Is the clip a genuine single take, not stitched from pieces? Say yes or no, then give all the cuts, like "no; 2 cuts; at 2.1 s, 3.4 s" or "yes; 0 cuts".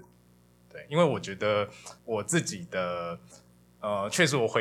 no; 1 cut; at 2.0 s